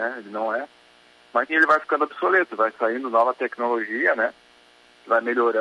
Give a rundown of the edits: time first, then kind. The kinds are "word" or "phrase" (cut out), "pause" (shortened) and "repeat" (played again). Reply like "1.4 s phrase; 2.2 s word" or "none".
1.5 s word